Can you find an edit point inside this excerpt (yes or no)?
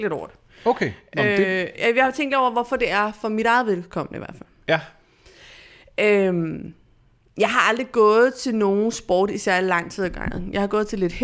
no